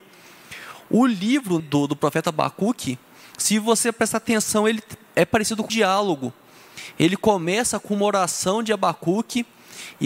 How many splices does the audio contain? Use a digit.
2